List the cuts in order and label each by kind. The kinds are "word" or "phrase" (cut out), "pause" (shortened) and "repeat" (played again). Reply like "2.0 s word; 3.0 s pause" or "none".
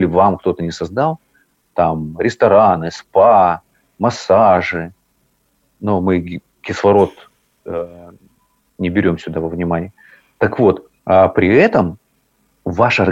11.0 s pause

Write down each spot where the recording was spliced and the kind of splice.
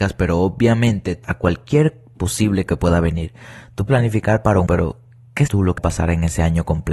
1.2 s word; 2.7 s word; 3.9 s word; 4.7 s word; 5.5 s word; 5.8 s word

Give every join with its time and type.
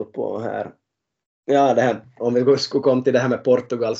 none

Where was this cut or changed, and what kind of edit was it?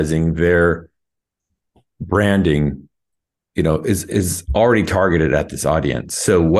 none

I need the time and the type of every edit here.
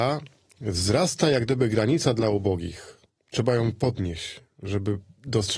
3.1 s pause

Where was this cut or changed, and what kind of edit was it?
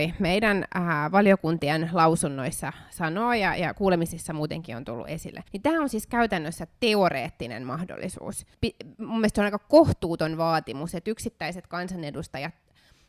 5.5 s pause; 8.5 s pause

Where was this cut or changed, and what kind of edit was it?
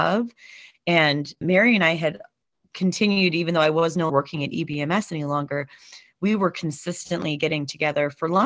1.4 s word; 4.1 s word

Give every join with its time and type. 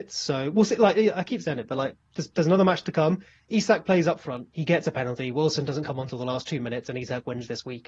none

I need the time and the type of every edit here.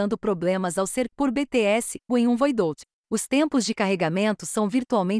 1.1 s word; 2.1 s phrase

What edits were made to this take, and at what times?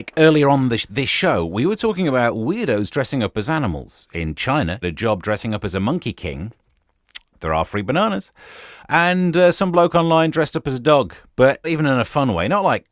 4.8 s phrase; 7.3 s pause; 11.6 s phrase

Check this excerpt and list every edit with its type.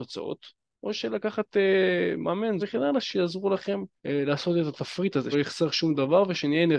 2.6 s word; 4.0 s pause; 5.3 s word

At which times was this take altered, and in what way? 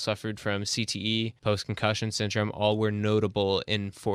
1.4 s pause

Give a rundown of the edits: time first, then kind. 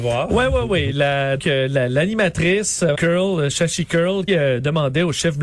1.4 s word; 2.9 s word; 4.3 s word

